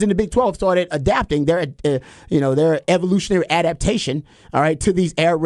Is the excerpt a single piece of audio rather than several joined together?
yes; 0 cuts

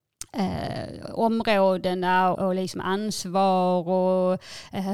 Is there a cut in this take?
yes; 1 cut; at 2.3 s

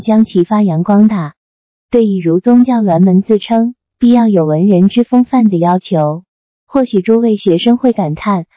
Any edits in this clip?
no; 0 cuts

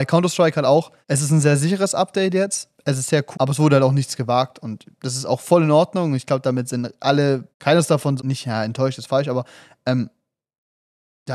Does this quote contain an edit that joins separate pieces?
yes; 4 cuts; at 1.0 s, 3.3 s, 7.5 s, 8.2 s

